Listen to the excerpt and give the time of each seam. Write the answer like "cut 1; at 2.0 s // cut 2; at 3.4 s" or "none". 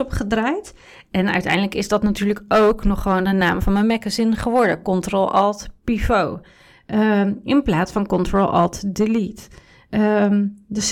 none